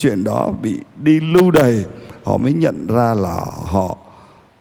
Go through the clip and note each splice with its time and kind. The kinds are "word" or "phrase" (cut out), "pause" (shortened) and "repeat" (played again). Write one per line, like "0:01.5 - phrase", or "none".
none